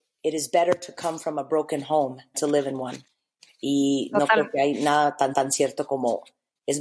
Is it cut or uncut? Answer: cut